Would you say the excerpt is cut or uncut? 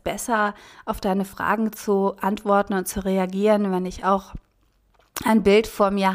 uncut